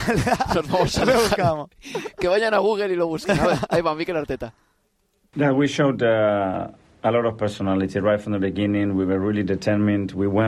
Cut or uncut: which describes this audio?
uncut